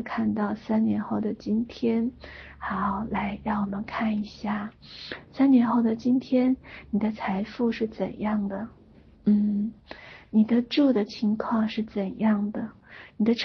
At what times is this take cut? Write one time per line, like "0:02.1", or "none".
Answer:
none